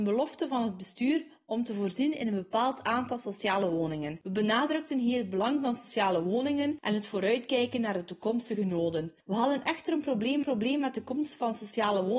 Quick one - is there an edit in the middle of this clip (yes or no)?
yes